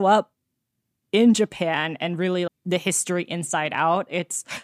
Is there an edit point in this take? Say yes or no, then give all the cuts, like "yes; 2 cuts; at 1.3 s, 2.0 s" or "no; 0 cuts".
yes; 1 cut; at 2.5 s